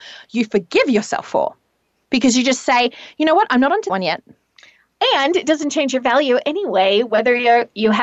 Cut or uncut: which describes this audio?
cut